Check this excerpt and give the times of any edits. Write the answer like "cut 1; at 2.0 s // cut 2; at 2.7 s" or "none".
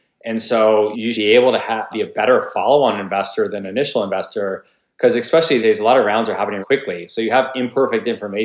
cut 1; at 1.1 s // cut 2; at 1.9 s // cut 3; at 5.6 s // cut 4; at 6.6 s